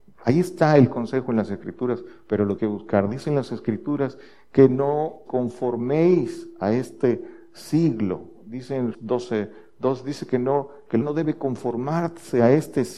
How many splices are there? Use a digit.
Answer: 4